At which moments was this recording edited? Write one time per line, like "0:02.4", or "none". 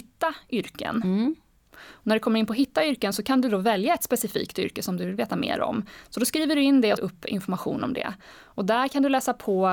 0:07.0